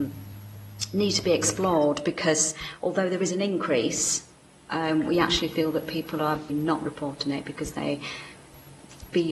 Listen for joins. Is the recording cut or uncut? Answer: cut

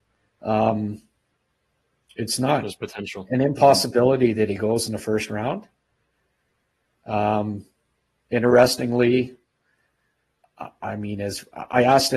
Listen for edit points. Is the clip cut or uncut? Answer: uncut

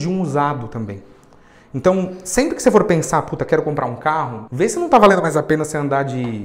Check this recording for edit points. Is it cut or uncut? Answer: uncut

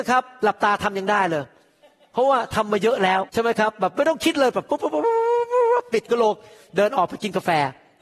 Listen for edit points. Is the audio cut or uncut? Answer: cut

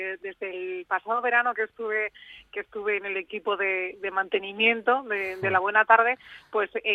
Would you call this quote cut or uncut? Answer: uncut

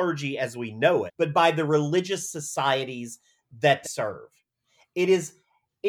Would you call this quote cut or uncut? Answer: cut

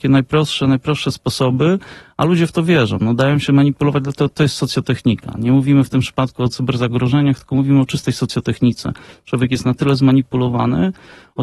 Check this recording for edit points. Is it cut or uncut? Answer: uncut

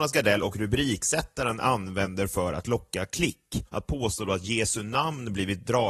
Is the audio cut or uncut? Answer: cut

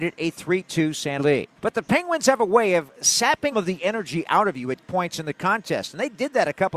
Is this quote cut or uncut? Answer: cut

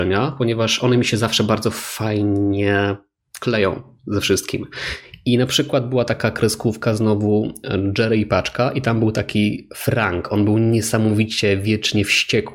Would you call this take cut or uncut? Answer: uncut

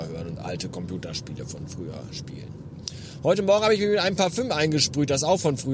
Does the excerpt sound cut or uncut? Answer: uncut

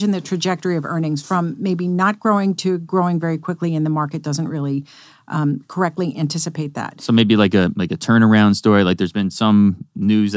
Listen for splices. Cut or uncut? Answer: uncut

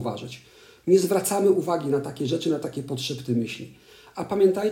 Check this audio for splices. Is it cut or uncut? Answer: uncut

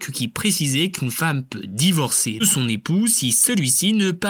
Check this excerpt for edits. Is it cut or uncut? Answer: cut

